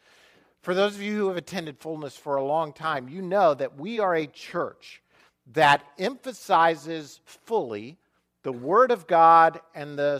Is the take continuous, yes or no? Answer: yes